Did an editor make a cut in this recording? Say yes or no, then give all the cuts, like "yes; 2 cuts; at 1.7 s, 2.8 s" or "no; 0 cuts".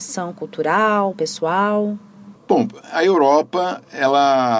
yes; 1 cut; at 1.1 s